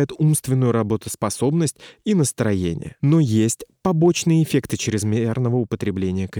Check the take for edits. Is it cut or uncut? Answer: uncut